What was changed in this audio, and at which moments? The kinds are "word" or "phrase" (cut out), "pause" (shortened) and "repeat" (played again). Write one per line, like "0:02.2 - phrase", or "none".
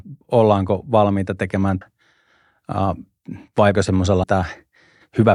0:01.8 - word
0:03.7 - word
0:04.2 - phrase